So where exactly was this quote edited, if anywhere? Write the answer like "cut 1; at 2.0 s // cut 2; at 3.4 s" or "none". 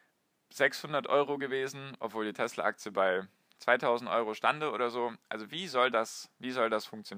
none